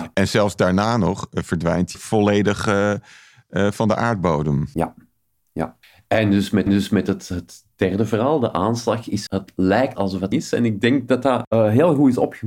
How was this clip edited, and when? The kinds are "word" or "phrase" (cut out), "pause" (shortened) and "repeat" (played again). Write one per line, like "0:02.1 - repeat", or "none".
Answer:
0:01.9 - word
0:05.8 - pause
0:06.7 - repeat
0:09.3 - word
0:10.0 - word
0:10.3 - phrase